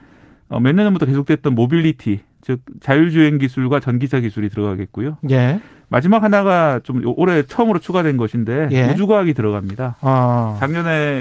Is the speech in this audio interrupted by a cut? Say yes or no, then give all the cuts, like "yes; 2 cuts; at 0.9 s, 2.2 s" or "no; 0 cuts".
no; 0 cuts